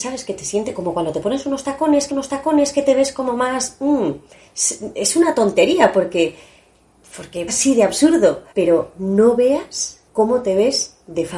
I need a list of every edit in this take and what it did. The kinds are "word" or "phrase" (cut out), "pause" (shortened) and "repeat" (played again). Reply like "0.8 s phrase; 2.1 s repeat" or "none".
2.1 s repeat; 7.5 s phrase; 8.5 s pause; 10.1 s pause